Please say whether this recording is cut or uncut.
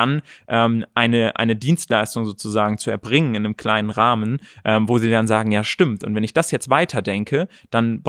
uncut